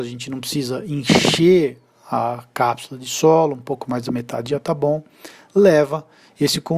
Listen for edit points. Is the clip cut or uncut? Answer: uncut